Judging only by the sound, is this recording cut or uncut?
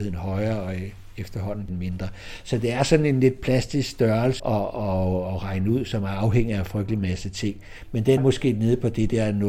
cut